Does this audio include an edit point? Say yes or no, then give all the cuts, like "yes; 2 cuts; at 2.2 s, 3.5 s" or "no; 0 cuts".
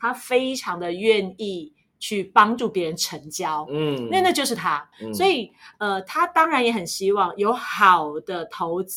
yes; 1 cut; at 4.9 s